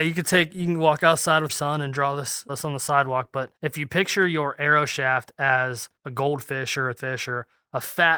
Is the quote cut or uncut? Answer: cut